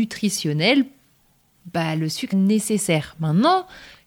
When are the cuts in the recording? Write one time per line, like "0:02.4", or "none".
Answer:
0:02.3